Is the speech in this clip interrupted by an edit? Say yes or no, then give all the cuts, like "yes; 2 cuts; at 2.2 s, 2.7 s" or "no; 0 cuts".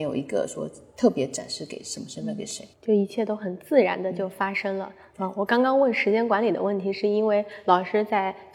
yes; 1 cut; at 2.7 s